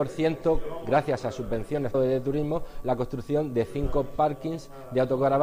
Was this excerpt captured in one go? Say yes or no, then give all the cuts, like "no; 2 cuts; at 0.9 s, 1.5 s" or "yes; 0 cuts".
no; 1 cut; at 1.9 s